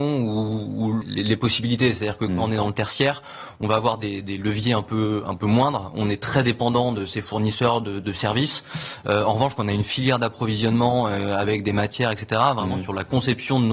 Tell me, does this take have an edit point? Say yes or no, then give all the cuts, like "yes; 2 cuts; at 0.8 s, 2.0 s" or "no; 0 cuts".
yes; 1 cut; at 1.0 s